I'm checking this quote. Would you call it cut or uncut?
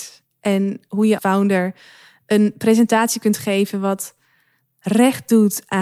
cut